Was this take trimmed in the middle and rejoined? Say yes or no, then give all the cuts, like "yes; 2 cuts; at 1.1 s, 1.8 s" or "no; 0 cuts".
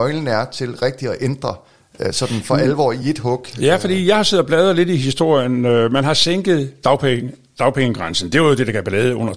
no; 0 cuts